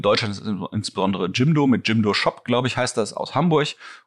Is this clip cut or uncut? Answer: uncut